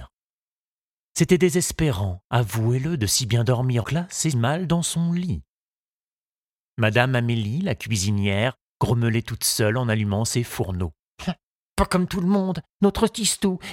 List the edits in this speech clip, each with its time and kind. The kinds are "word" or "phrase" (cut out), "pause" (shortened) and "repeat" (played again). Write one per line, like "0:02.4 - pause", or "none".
0:03.8 - word
0:04.3 - word